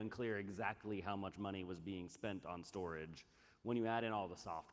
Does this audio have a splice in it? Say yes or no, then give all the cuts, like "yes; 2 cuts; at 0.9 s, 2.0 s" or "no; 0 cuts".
no; 0 cuts